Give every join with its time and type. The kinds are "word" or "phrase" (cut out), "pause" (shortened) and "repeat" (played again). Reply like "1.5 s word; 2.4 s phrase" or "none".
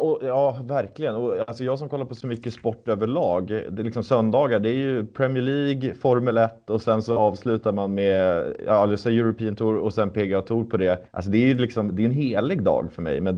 11.1 s pause